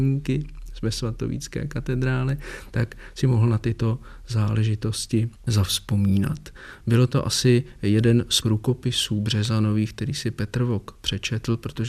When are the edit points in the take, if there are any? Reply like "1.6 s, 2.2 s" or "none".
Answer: 5.4 s, 8.4 s